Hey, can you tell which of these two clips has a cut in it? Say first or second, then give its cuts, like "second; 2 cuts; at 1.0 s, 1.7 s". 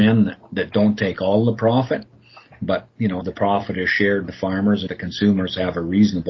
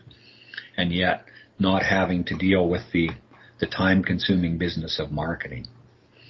first; 4 cuts; at 2.9 s, 3.2 s, 4.3 s, 4.9 s